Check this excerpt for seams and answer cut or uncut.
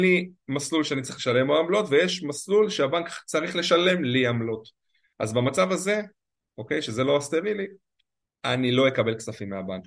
uncut